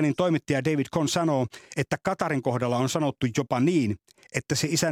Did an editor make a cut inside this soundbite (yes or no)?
no